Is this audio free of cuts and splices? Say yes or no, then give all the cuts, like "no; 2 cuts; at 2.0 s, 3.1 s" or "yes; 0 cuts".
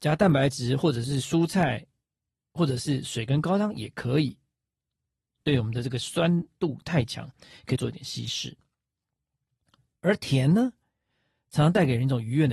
yes; 0 cuts